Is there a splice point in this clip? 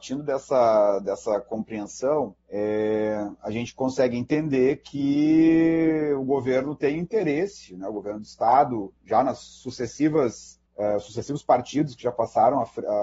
yes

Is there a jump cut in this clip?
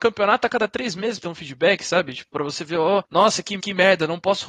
yes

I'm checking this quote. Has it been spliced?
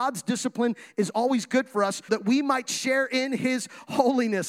yes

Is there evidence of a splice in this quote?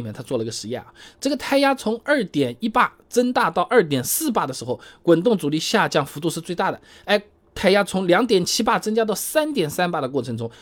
no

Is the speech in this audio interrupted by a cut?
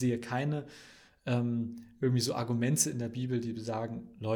no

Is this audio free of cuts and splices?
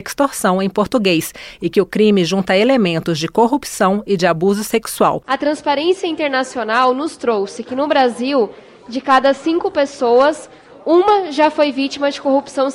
yes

